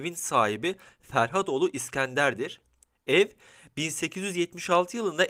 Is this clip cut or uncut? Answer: uncut